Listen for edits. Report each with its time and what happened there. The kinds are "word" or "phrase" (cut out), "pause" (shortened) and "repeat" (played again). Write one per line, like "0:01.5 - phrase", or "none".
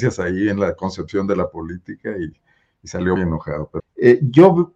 0:03.2 - word
0:03.8 - word